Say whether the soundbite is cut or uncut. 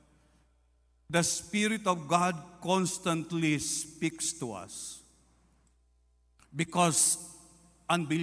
uncut